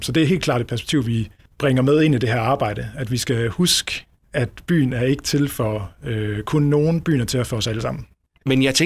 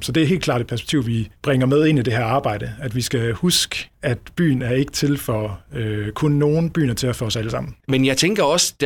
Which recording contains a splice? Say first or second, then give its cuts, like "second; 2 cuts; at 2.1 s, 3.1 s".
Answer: second; 3 cuts; at 1.4 s, 3.9 s, 7.8 s